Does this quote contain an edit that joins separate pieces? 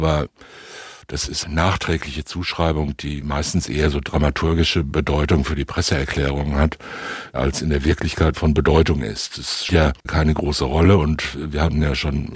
yes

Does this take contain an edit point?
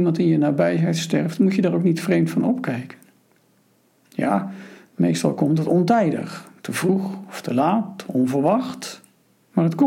no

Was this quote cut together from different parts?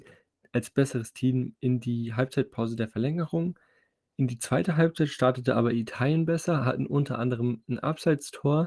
no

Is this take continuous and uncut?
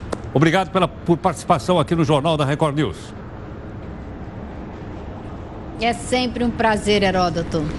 yes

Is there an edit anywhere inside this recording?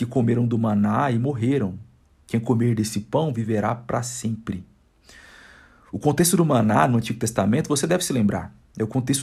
no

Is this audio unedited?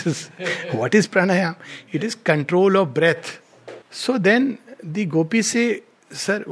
no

